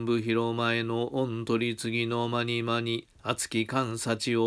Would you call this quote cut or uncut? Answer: cut